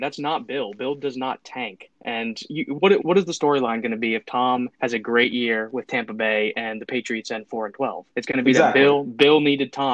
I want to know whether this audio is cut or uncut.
cut